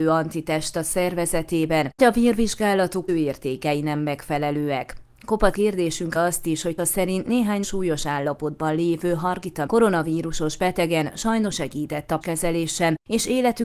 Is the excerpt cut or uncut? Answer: cut